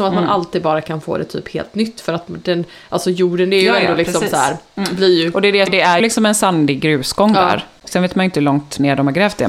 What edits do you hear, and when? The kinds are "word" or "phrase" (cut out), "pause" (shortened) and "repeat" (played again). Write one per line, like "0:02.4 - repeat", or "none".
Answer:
0:05.7 - word
0:06.0 - word